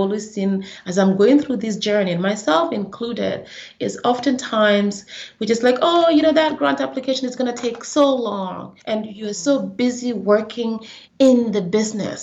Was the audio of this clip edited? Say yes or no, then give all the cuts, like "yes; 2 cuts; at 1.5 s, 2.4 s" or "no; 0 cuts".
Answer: yes; 2 cuts; at 8.8 s, 11.1 s